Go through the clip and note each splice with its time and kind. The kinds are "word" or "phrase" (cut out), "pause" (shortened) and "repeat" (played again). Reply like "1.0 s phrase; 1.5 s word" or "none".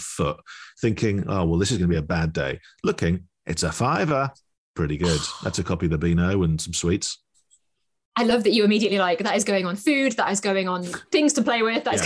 none